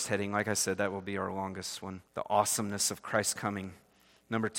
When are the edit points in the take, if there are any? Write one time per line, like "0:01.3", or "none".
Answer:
0:02.1